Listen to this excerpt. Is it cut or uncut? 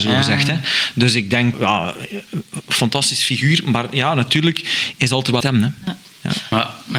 cut